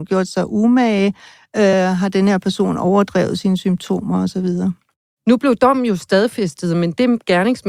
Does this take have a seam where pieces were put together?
no; 0 cuts

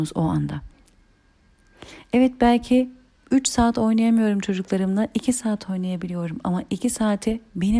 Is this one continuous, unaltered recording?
no; 1 cut; at 3.2 s

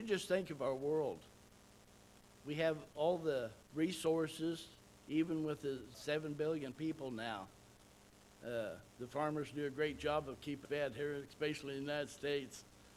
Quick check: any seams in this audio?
yes; 4 cuts; at 3.6 s, 5.9 s, 8.9 s, 10.6 s

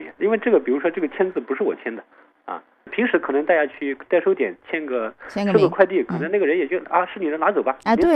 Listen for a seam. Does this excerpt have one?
no; 0 cuts

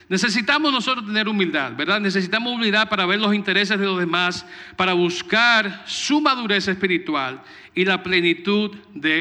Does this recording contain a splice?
no; 0 cuts

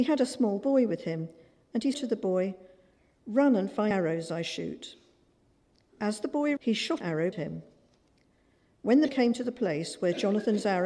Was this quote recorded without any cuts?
no; 6 cuts; at 1.9 s, 3.9 s, 6.6 s, 7.0 s, 7.3 s, 9.1 s

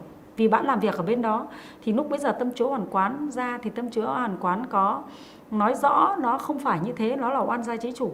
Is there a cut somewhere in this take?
no; 0 cuts

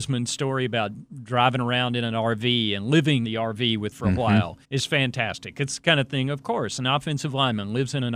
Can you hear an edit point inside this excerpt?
yes; 3 cuts; at 3.2 s, 3.9 s, 4.6 s

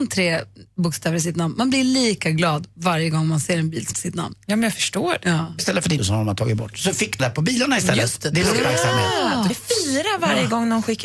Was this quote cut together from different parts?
yes; 5 cuts; at 3.9 s, 5.6 s, 6.0 s, 7.2 s, 9.5 s

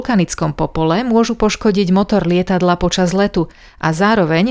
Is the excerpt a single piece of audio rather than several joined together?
yes; 0 cuts

